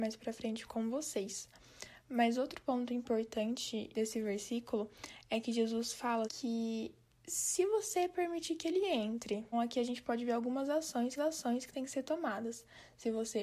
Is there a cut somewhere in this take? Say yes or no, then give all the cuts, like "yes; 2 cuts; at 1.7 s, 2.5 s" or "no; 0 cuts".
yes; 4 cuts; at 3.9 s, 6.3 s, 9.5 s, 11.2 s